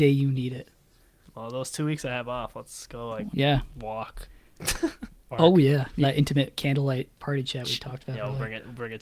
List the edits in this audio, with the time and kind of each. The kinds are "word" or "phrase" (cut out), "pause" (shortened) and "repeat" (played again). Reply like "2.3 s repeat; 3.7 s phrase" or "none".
3.3 s word; 5.3 s word; 6.0 s word; 7.2 s word